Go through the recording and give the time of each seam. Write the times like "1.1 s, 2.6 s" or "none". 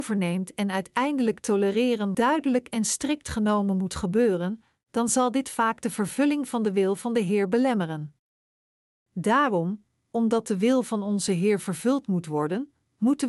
2.1 s